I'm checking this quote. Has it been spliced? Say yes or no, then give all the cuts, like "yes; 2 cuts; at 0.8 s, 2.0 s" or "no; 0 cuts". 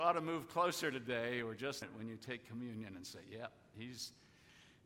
yes; 1 cut; at 1.8 s